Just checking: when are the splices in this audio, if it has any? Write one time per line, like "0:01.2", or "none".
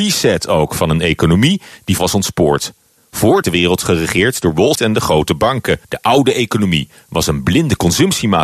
0:02.0
0:03.4
0:04.7
0:05.8